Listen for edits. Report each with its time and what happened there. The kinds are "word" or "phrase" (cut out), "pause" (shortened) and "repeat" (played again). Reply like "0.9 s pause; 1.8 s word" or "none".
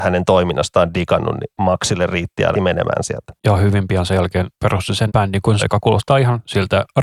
2.5 s word; 5.1 s word; 5.6 s word

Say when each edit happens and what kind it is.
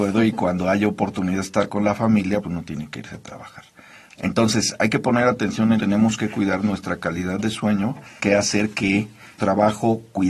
2.4 s word; 5.8 s word; 8.2 s word; 9.4 s word

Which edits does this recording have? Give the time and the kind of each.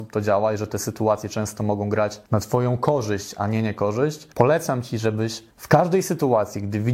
2.3 s pause; 4.3 s pause; 5.5 s pause

